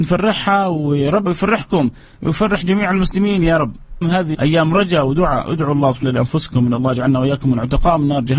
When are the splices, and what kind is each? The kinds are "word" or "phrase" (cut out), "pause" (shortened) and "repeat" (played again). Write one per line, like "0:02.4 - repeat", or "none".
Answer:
0:01.3 - word
0:04.0 - word
0:04.3 - word
0:06.0 - word